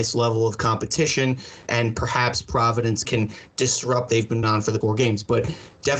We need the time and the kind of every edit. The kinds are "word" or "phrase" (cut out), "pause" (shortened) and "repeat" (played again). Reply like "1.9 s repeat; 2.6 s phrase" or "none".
1.7 s word; 3.0 s phrase; 4.1 s word; 4.4 s word; 4.8 s word

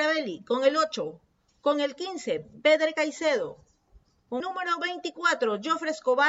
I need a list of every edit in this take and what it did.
4.4 s word

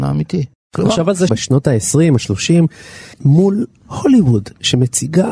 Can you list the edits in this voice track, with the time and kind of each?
1.3 s phrase; 3.1 s phrase

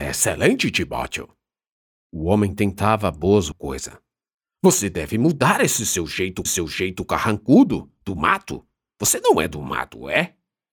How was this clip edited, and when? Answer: 3.5 s phrase; 6.5 s repeat

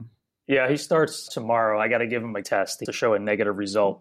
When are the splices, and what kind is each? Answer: 1.3 s word; 2.4 s word; 2.9 s word

